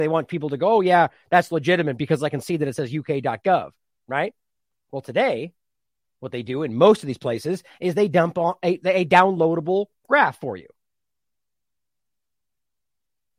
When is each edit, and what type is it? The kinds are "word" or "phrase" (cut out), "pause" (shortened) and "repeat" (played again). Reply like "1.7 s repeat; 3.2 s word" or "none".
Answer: none